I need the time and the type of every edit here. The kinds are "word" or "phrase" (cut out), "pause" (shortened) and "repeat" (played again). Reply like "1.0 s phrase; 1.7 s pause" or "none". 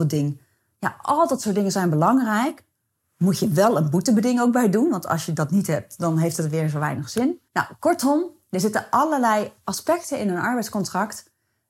7.5 s pause